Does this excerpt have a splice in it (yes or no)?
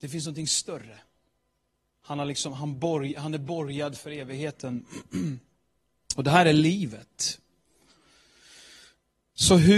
no